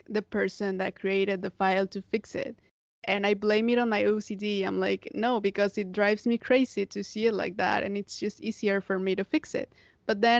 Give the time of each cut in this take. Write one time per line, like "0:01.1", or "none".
0:02.7